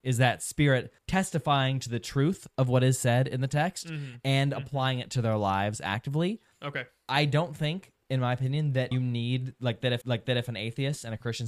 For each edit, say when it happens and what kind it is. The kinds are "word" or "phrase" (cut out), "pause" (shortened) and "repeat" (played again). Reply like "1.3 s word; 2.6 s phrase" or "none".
1.0 s pause; 8.9 s word; 10.0 s repeat